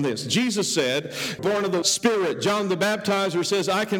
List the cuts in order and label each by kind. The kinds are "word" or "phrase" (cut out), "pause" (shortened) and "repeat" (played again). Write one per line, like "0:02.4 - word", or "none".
0:01.4 - phrase
0:01.8 - phrase